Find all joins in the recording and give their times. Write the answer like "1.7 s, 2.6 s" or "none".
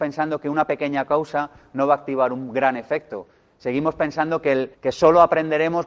4.7 s